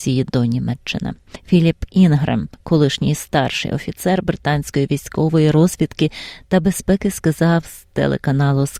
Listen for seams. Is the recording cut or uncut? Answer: uncut